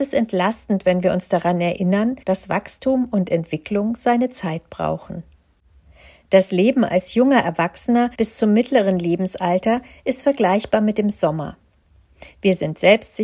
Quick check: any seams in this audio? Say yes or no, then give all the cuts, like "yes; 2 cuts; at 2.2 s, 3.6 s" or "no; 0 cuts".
yes; 2 cuts; at 2.2 s, 8.1 s